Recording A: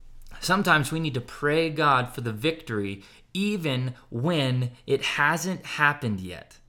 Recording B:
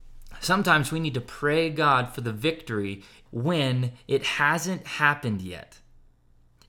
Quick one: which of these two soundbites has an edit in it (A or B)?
B